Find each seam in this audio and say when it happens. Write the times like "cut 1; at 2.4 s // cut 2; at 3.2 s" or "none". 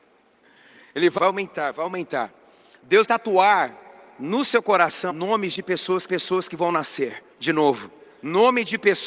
cut 1; at 1.2 s // cut 2; at 3.0 s // cut 3; at 5.1 s // cut 4; at 6.1 s // cut 5; at 7.3 s // cut 6; at 8.1 s